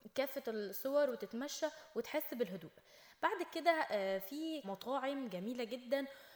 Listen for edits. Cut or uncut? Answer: cut